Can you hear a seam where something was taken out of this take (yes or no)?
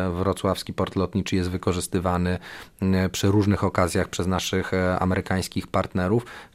no